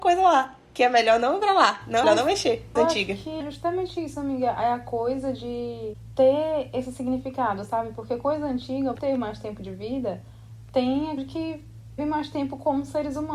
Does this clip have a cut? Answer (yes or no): yes